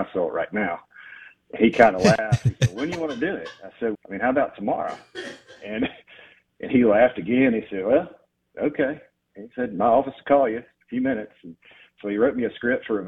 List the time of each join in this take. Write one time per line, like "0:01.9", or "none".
0:03.9
0:06.7